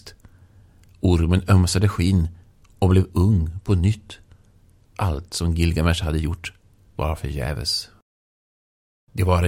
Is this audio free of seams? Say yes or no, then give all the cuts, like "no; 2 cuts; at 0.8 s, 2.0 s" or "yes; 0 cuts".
yes; 0 cuts